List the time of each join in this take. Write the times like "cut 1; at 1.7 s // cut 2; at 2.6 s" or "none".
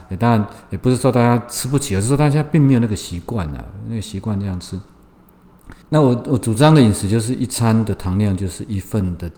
cut 1; at 5.8 s